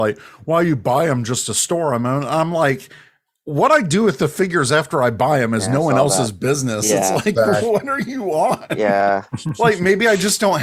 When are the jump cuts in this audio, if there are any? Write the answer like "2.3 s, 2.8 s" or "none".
none